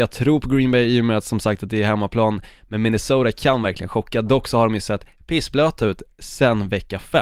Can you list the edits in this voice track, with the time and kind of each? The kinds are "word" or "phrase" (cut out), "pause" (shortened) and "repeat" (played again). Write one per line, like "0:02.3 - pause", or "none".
none